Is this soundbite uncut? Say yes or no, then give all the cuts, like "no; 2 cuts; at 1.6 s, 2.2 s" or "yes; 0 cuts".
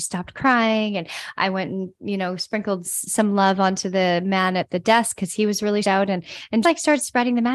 no; 3 cuts; at 2.8 s, 5.8 s, 6.6 s